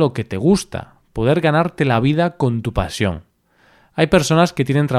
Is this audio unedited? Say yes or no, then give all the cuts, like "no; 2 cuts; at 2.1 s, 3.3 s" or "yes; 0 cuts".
yes; 0 cuts